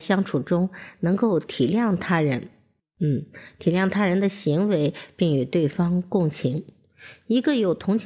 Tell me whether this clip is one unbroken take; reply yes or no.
yes